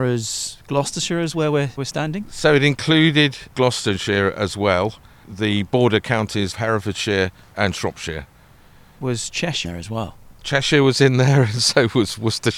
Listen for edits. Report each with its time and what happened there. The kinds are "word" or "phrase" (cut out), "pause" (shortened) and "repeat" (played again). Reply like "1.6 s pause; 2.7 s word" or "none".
1.3 s word; 1.8 s word; 3.5 s word; 5.2 s word; 6.5 s word; 9.6 s word